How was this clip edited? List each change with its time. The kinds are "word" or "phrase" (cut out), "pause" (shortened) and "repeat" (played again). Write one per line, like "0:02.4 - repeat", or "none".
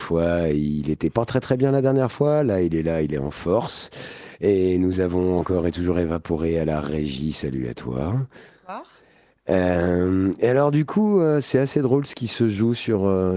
none